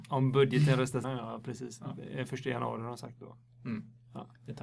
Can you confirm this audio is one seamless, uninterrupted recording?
no; 1 cut; at 1.0 s

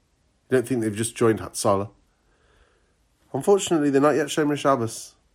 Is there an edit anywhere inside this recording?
no; 0 cuts

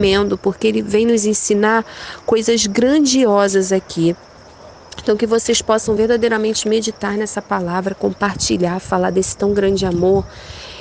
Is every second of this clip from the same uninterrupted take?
yes; 0 cuts

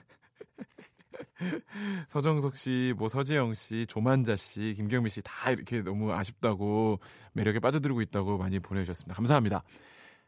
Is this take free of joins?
yes; 0 cuts

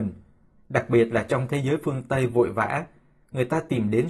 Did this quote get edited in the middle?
no; 0 cuts

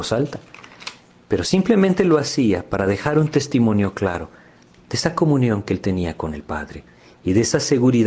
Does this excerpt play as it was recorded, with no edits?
yes; 0 cuts

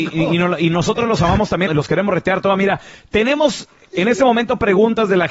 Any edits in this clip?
yes; 1 cut; at 1.7 s

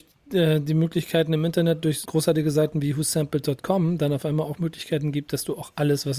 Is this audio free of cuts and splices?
no; 1 cut; at 2.0 s

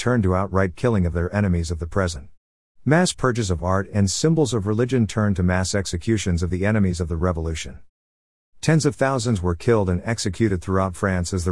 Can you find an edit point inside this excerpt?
no; 0 cuts

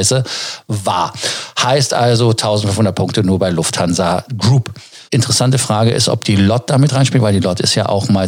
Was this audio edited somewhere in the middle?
yes; 1 cut; at 5.1 s

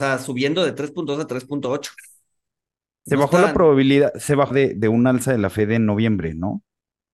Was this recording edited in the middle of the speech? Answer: yes; 1 cut; at 4.5 s

